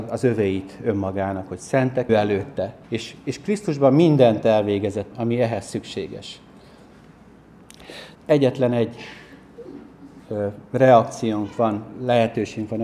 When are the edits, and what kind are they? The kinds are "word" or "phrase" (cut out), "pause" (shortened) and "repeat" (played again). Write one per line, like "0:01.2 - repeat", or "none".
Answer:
0:02.1 - phrase
0:02.8 - pause
0:05.1 - word
0:08.1 - pause

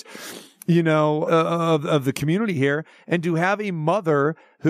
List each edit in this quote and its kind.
0:01.3 - phrase

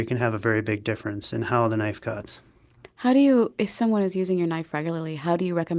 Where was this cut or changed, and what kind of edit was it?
none

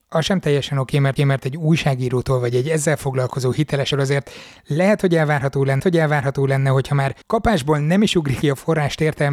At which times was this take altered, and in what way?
0:01.2 - repeat
0:03.9 - word
0:05.8 - repeat
0:07.2 - pause
0:08.4 - word

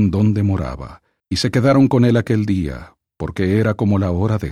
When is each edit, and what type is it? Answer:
0:01.2 - pause

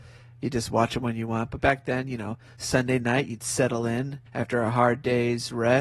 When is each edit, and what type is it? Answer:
0:04.3 - pause

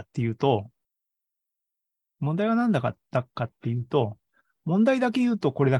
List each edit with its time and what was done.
none

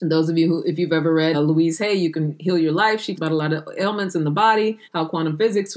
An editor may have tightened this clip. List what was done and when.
0:01.3 - word
0:03.2 - word
0:04.8 - pause

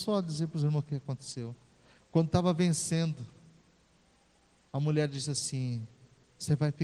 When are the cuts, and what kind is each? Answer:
none

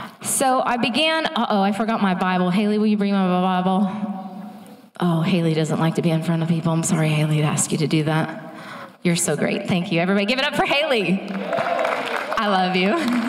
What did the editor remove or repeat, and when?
none

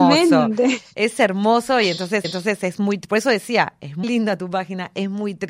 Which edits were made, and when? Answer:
0:02.2 - repeat
0:04.0 - word

